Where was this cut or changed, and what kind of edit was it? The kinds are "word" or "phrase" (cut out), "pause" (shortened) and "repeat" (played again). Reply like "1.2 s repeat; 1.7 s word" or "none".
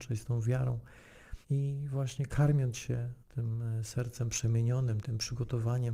1.4 s pause; 3.2 s pause; 5.0 s word